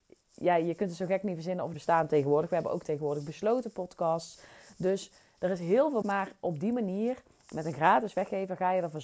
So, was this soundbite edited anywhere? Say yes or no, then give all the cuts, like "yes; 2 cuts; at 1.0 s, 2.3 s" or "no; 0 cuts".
yes; 2 cuts; at 1.7 s, 6.0 s